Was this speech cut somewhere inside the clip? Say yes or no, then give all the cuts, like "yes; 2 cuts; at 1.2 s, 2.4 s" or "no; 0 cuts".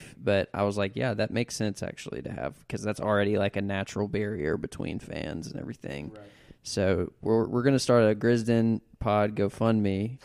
no; 0 cuts